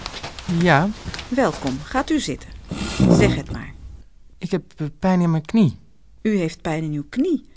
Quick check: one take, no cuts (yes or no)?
yes